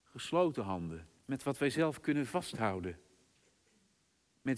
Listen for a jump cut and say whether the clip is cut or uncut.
cut